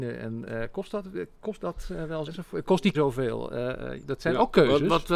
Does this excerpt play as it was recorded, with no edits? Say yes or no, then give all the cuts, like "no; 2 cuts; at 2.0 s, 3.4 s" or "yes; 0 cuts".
no; 4 cuts; at 1.6 s, 2.3 s, 2.9 s, 4.0 s